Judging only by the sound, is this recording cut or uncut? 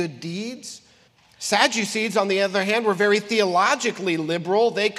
cut